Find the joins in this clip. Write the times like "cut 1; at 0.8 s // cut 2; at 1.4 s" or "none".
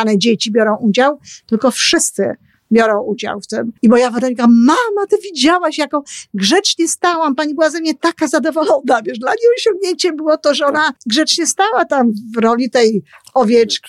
cut 1; at 3.8 s // cut 2; at 11.0 s